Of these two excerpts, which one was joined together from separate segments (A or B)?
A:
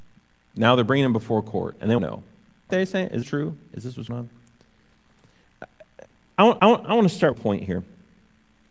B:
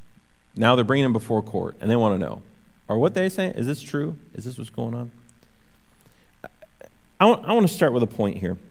A